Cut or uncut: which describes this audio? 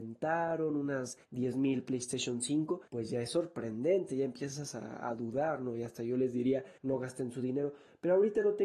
cut